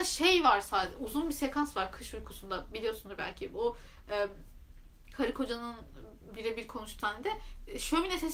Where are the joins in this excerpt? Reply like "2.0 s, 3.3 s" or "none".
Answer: 7.0 s